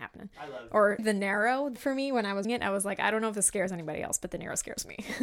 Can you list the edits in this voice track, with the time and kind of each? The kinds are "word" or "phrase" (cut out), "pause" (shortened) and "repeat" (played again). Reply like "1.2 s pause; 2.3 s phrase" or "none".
1.0 s word; 1.8 s word; 2.4 s word